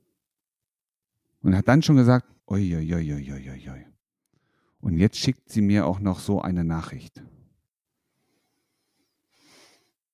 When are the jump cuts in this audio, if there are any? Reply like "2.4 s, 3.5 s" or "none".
2.4 s